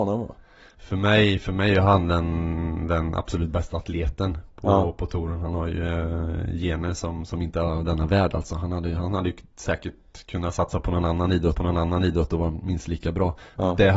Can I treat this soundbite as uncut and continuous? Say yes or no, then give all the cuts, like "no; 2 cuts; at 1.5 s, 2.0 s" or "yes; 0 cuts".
no; 1 cut; at 11.6 s